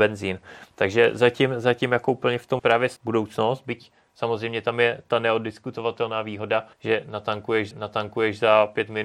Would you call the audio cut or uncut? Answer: cut